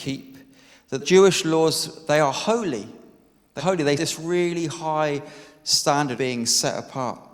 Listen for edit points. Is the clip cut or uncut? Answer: cut